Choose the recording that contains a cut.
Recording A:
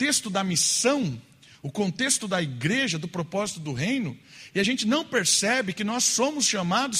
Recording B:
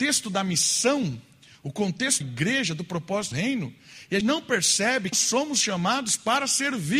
B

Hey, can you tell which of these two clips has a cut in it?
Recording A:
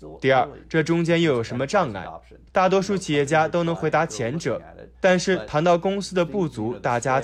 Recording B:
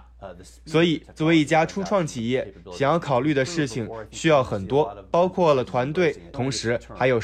B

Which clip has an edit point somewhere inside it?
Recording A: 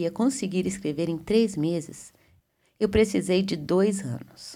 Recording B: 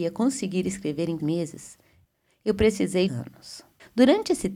B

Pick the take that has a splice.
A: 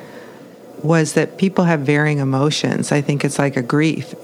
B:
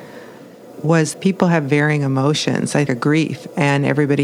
B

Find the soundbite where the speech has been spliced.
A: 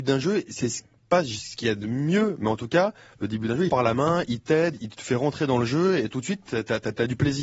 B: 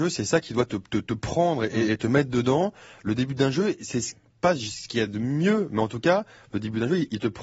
A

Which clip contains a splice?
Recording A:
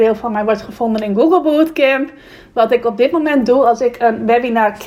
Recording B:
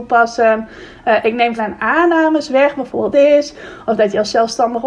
B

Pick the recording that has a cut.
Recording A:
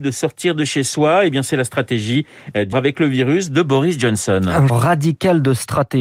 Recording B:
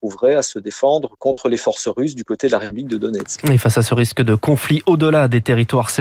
A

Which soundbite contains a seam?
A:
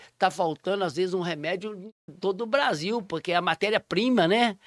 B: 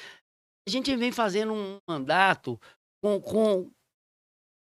A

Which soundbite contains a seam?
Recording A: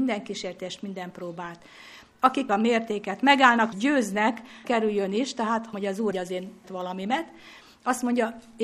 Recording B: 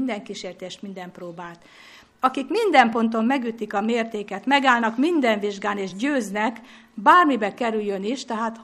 A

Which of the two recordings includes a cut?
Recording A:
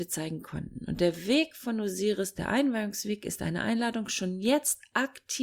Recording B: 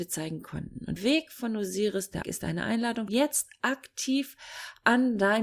B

